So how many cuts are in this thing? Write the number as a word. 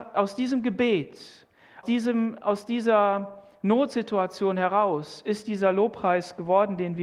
one